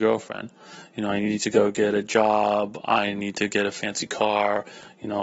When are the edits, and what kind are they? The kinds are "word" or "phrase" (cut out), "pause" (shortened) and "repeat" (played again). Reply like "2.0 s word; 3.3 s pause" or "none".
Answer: none